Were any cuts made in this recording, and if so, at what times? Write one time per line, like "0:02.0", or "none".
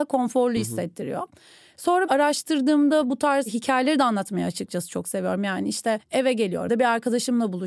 0:02.1
0:06.7

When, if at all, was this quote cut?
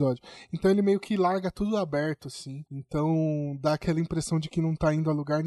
0:02.7

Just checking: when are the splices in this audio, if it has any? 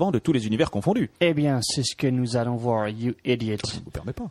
0:01.2

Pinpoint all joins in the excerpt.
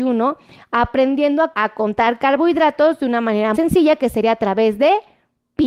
0:01.5
0:03.5

